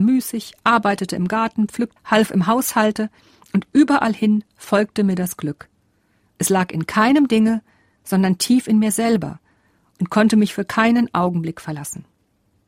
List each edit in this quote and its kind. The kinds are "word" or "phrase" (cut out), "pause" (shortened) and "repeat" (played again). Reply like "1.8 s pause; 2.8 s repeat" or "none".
2.0 s word